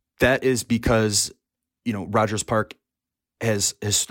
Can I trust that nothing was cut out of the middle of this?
yes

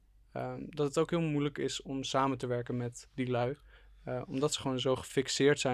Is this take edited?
no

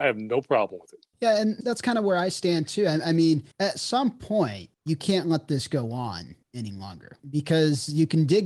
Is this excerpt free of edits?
no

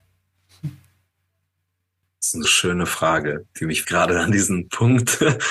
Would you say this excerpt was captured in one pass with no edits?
no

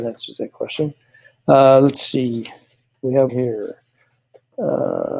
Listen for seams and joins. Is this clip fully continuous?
no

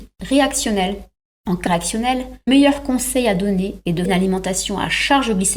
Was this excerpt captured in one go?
no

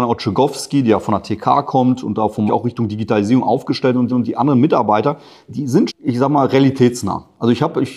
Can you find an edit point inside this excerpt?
yes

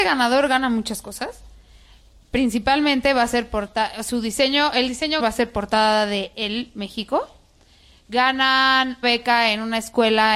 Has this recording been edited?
yes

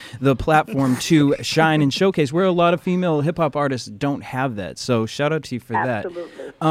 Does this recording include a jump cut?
no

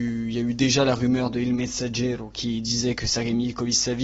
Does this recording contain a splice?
no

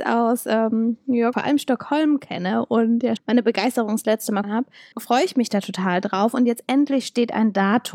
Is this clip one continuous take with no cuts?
no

